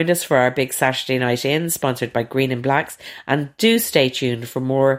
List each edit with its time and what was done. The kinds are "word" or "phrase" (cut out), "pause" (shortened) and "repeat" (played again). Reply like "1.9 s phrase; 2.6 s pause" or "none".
none